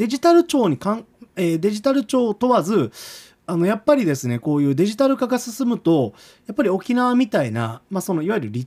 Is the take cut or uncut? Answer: uncut